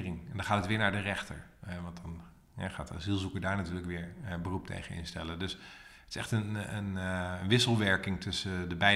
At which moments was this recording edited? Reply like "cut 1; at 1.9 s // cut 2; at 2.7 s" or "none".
none